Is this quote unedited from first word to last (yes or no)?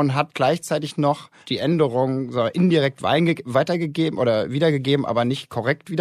no